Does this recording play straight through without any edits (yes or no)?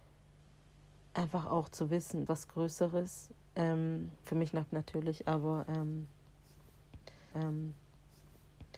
no